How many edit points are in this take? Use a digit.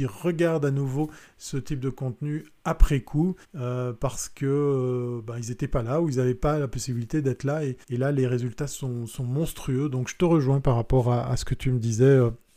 2